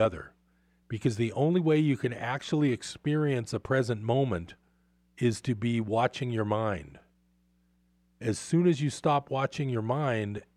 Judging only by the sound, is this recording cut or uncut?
uncut